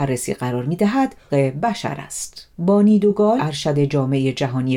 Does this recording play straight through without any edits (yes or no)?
no